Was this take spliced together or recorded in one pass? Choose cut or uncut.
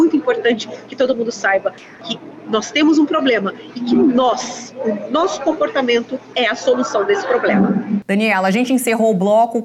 uncut